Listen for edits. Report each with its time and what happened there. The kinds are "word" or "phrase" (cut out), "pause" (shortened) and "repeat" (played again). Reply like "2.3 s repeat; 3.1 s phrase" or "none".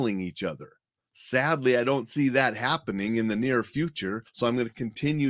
none